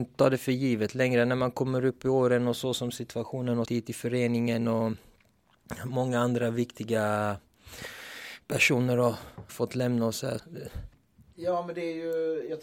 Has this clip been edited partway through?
yes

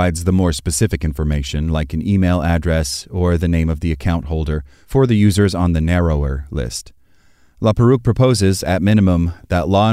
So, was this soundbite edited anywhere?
no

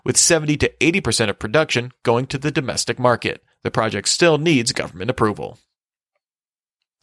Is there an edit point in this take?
yes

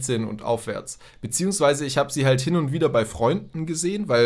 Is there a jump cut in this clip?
no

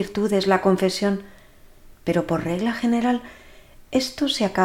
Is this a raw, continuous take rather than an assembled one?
yes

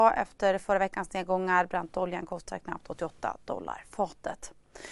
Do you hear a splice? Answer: no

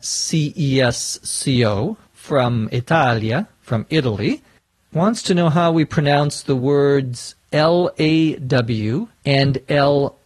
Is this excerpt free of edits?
no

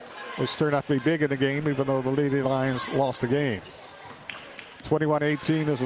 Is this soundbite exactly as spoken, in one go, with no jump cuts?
yes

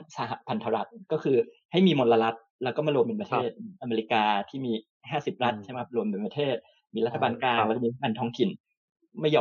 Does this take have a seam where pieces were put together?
no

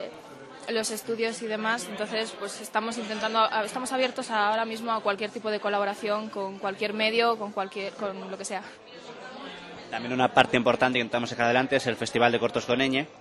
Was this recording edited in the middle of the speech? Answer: no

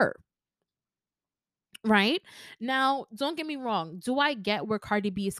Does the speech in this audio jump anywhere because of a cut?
no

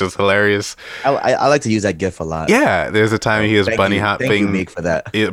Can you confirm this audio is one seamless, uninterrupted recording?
yes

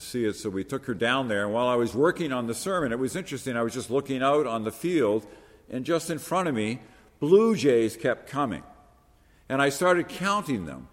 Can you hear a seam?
no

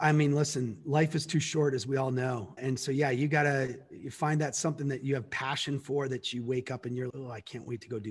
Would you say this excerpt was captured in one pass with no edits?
no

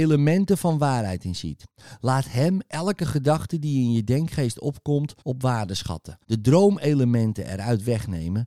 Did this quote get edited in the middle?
yes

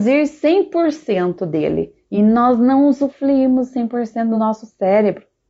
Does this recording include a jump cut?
no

